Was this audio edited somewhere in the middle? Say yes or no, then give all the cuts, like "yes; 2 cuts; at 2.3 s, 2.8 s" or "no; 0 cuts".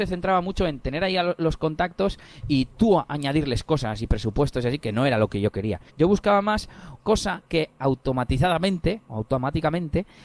yes; 2 cuts; at 5.9 s, 7.0 s